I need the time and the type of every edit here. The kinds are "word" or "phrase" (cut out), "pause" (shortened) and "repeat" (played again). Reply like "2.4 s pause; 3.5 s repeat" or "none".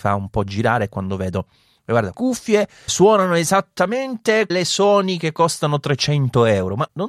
2.1 s word; 2.9 s word; 4.5 s word